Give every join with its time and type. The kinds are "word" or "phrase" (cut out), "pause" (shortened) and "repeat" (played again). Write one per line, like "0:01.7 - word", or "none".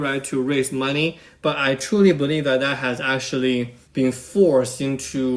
0:03.8 - pause